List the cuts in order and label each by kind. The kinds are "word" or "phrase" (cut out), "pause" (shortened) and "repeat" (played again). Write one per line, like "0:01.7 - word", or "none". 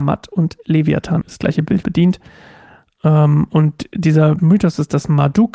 0:01.2 - word
0:01.8 - word
0:04.4 - word